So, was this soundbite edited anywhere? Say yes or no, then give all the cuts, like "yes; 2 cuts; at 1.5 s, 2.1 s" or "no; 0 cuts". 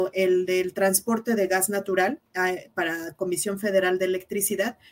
yes; 1 cut; at 2.3 s